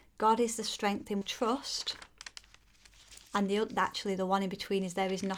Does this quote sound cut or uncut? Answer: cut